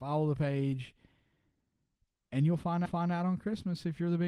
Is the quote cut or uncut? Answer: cut